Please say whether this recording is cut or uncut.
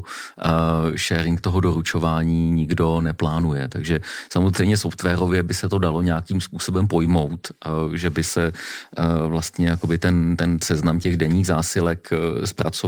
uncut